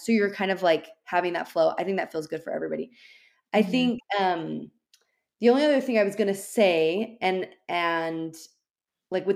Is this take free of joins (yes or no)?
yes